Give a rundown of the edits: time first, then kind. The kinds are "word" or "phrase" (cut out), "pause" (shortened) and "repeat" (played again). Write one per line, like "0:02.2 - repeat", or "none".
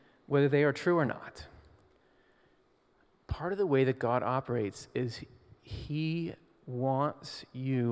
none